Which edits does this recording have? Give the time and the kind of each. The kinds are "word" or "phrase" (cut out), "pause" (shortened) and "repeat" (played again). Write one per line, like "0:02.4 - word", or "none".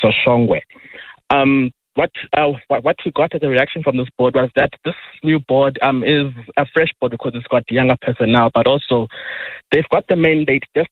none

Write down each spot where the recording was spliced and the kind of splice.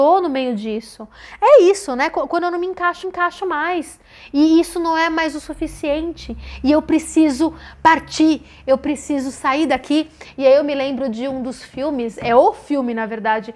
0:03.0 - repeat

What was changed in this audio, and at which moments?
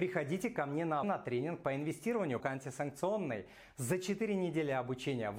0:01.0 - word
0:02.4 - word

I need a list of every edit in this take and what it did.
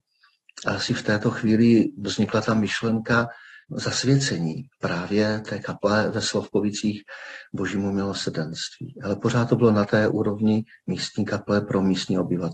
0:04.7 - pause

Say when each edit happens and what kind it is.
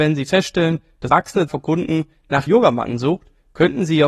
0:01.1 - word
0:01.5 - word
0:02.5 - word

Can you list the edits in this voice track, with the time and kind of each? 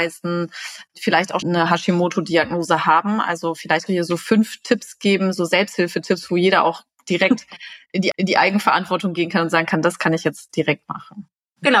0:01.4 - word
0:03.9 - word
0:08.1 - repeat

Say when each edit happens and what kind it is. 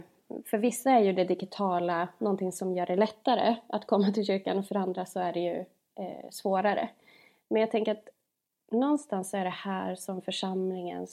none

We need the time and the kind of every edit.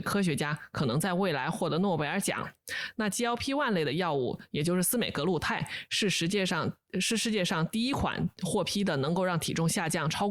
none

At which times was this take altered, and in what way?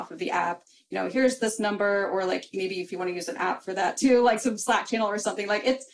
none

